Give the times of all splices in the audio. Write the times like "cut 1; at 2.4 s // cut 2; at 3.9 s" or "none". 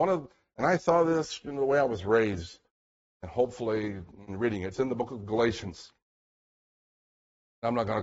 none